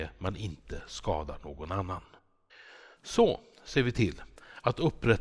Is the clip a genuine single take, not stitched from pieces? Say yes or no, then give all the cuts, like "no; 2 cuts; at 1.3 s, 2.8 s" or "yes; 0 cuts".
yes; 0 cuts